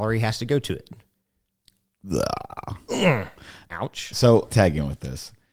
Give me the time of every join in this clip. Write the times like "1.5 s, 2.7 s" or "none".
4.5 s